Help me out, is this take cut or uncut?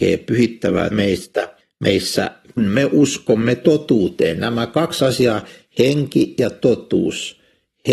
cut